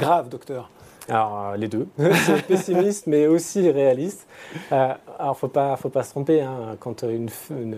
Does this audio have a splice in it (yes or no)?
no